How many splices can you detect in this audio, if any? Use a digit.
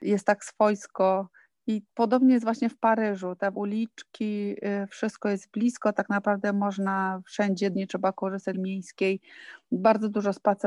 4